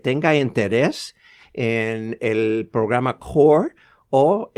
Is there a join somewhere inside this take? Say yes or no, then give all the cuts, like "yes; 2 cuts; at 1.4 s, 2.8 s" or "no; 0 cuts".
no; 0 cuts